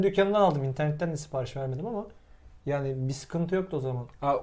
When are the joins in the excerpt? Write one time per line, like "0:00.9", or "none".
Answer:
none